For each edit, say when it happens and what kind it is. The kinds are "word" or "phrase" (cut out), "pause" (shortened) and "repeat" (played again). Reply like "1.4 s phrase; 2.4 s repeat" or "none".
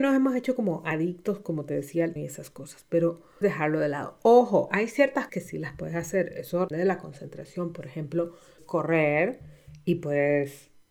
2.2 s word; 3.4 s word; 5.3 s word; 6.7 s word; 8.6 s word